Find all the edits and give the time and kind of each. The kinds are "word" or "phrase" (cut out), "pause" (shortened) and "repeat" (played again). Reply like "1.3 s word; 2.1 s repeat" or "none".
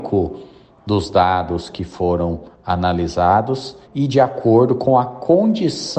3.8 s pause